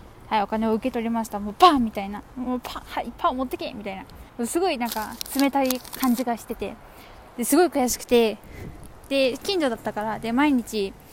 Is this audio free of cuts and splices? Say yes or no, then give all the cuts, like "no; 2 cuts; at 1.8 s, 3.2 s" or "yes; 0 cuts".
no; 1 cut; at 4.3 s